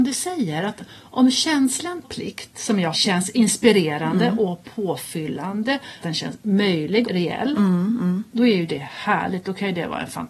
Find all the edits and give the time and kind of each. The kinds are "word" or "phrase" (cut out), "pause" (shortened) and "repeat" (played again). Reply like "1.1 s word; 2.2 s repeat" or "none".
2.0 s word; 2.9 s word; 6.0 s word; 7.0 s word